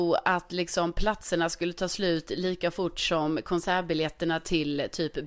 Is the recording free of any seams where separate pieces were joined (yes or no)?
yes